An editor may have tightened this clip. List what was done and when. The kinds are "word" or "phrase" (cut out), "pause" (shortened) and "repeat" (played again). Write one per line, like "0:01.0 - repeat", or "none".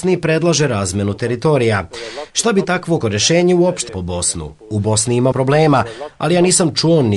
0:03.0 - word
0:03.9 - word
0:05.3 - word